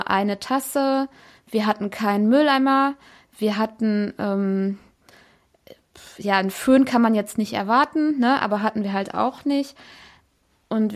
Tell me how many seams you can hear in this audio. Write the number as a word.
zero